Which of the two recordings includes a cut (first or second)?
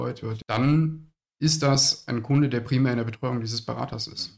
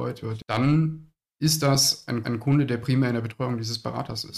second